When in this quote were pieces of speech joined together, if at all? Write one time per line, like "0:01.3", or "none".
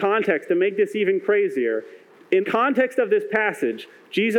0:02.4